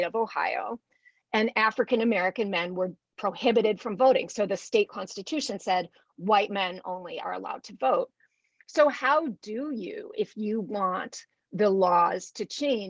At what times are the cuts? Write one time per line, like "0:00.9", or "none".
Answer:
none